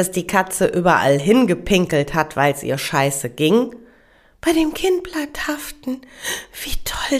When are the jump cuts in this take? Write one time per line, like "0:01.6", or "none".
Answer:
none